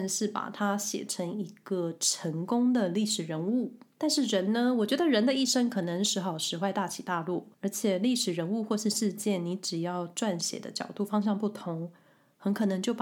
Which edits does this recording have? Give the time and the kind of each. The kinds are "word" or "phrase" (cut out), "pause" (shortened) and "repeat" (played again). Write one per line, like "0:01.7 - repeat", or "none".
0:07.5 - pause